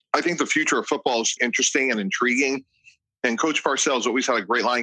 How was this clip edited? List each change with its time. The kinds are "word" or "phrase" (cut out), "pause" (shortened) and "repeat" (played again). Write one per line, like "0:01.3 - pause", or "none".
0:01.4 - word